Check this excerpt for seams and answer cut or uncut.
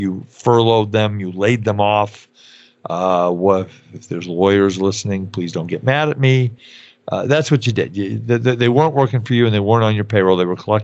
uncut